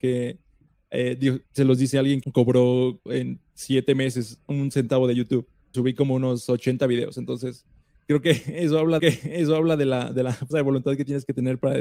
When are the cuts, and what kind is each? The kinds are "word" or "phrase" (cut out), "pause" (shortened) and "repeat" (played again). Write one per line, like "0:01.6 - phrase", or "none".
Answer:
0:01.5 - pause
0:02.2 - word
0:03.1 - word
0:05.7 - word
0:09.0 - repeat
0:10.5 - word